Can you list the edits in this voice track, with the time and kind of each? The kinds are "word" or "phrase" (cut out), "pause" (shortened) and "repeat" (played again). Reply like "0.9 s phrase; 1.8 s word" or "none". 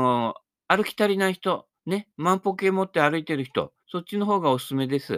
1.8 s pause; 3.8 s pause